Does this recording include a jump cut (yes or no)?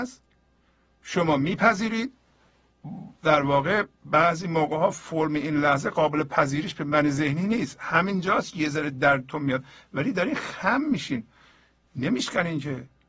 yes